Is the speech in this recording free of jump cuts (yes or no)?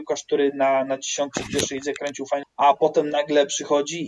no